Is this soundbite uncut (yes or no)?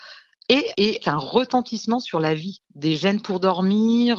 no